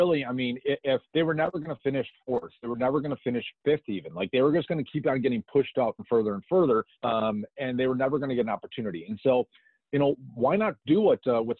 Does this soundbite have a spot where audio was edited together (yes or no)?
yes